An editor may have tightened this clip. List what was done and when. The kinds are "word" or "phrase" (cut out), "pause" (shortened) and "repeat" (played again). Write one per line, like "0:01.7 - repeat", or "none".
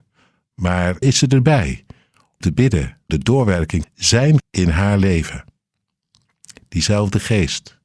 0:01.0 - word
0:02.4 - word
0:03.1 - word
0:03.8 - word
0:04.4 - word